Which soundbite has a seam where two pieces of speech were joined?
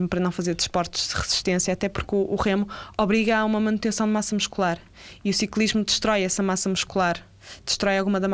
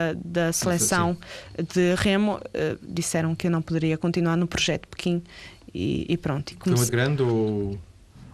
second; 2 cuts; at 6.5 s, 6.9 s

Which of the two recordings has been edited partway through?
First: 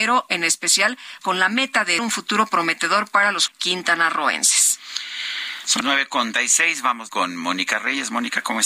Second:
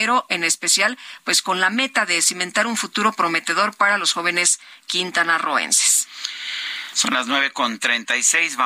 first; 6 cuts; at 1.2 s, 2.0 s, 3.5 s, 5.8 s, 6.3 s, 7.1 s

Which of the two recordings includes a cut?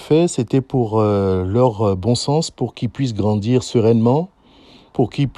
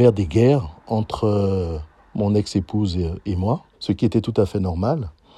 second; 2 cuts; at 2.0 s, 3.7 s

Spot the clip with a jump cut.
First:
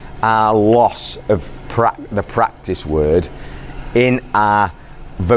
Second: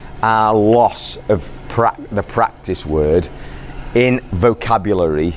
second; 1 cut; at 4.3 s

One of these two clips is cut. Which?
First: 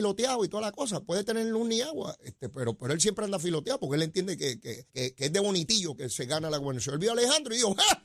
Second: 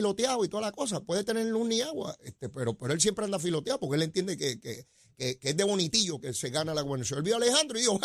first; 1 cut; at 4.9 s

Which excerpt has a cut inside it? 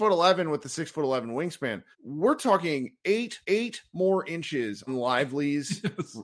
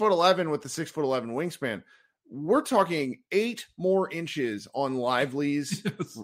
first; 3 cuts; at 1.9 s, 3.4 s, 4.9 s

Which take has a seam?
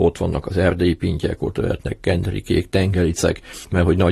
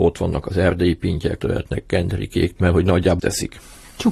second; 3 cuts; at 1.4 s, 2.6 s, 3.2 s

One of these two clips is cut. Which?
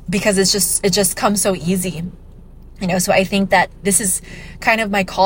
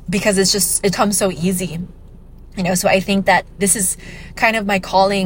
second; 1 cut; at 0.9 s

